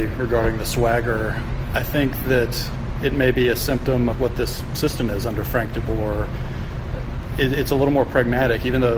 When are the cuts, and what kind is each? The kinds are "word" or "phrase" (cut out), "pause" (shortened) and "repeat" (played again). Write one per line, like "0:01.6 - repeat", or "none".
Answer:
0:04.1 - word

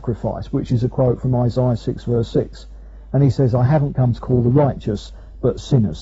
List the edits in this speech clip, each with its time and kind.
none

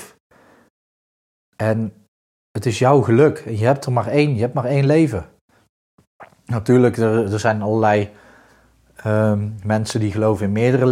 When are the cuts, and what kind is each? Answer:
none

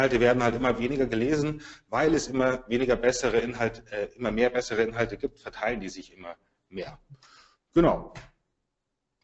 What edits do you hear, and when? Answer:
none

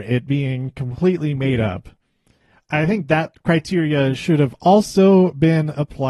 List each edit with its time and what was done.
none

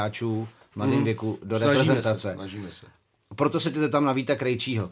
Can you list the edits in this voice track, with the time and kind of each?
none

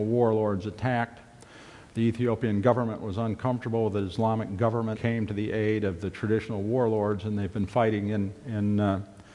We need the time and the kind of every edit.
0:04.9 - phrase

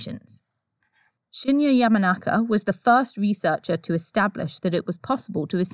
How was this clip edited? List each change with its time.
none

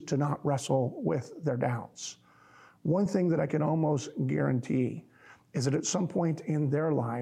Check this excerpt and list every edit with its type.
none

